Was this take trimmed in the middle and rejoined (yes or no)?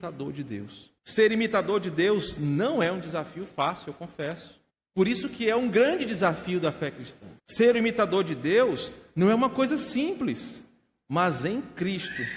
yes